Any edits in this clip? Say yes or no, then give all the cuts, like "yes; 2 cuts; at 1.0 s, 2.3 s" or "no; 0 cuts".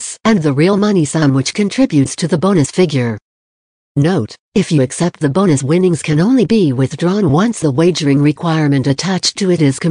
no; 0 cuts